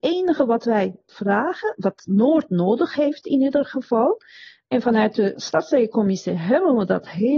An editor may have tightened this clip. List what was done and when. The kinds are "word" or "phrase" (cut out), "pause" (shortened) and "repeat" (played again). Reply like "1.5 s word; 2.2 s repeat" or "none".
none